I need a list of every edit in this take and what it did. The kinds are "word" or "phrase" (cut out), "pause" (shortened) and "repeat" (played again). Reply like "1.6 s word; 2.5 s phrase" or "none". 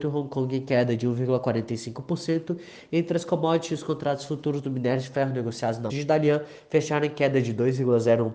5.9 s word